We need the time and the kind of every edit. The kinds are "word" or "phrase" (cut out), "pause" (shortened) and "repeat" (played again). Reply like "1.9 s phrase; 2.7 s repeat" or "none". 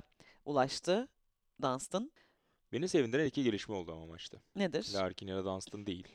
none